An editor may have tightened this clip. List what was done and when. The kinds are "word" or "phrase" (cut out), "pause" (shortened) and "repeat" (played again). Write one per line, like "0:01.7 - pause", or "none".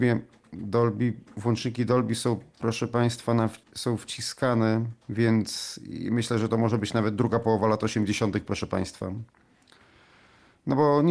0:03.6 - pause
0:05.0 - pause

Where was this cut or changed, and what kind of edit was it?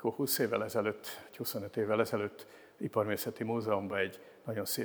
none

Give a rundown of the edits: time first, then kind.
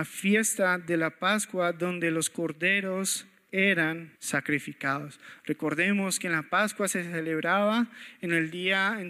0:04.2 - pause

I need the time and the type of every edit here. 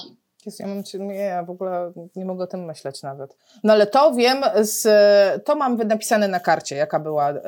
none

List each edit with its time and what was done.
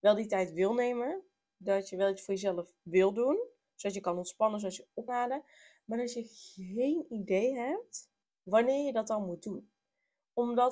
0:05.1 - word
0:08.2 - pause

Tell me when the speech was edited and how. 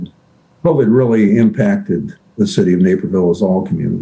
none

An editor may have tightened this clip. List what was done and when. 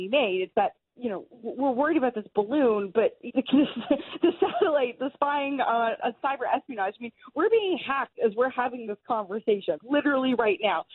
0:00.9 - word
0:03.3 - word
0:05.0 - word
0:06.0 - word
0:09.8 - word

